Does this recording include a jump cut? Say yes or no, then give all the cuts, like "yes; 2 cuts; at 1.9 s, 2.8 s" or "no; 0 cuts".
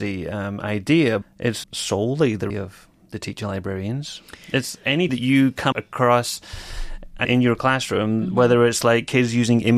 yes; 6 cuts; at 1.2 s, 1.6 s, 2.5 s, 5.1 s, 5.7 s, 7.2 s